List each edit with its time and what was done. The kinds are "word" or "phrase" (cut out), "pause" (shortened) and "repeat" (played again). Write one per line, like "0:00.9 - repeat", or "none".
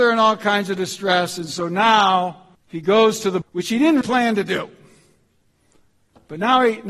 0:02.5 - pause
0:03.4 - word
0:04.0 - word